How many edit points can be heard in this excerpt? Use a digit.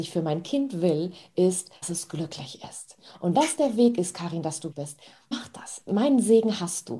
4